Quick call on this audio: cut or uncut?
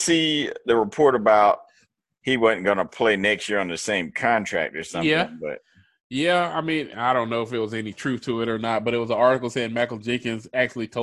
cut